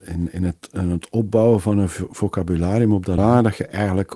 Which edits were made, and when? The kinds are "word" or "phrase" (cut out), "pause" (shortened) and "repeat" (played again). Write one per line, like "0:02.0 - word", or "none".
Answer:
0:03.2 - phrase